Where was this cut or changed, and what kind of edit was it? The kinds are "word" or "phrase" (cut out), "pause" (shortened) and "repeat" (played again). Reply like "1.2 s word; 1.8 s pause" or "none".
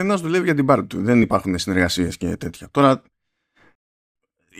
none